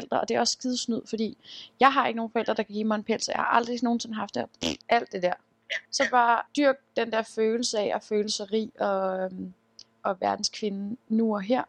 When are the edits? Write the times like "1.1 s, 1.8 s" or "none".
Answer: 4.8 s, 5.9 s, 6.5 s